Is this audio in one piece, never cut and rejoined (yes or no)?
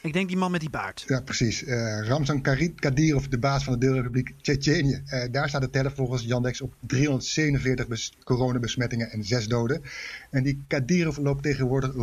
yes